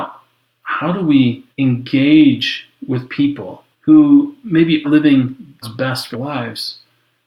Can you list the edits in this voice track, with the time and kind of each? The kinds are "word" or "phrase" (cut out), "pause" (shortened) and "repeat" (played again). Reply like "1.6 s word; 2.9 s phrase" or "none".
1.5 s pause; 3.7 s pause; 4.8 s word; 5.6 s word; 6.1 s word